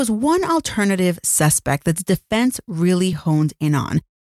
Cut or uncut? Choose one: uncut